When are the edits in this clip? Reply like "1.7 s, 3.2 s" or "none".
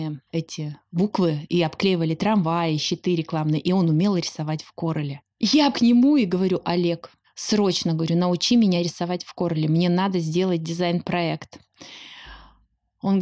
5.7 s, 7.2 s